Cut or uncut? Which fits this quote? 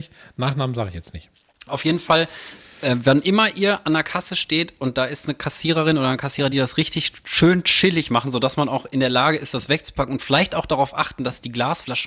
uncut